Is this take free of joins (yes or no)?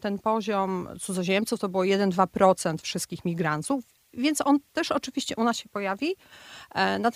yes